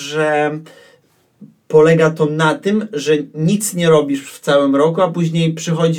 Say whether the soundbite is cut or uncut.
uncut